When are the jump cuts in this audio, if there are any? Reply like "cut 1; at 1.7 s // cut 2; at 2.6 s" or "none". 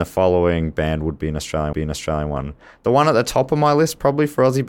cut 1; at 1.7 s